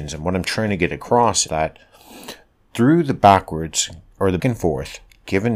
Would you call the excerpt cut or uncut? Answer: cut